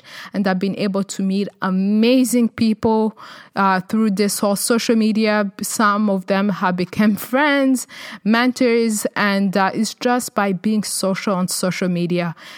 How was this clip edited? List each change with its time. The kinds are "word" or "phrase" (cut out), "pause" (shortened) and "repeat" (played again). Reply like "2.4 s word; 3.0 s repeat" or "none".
none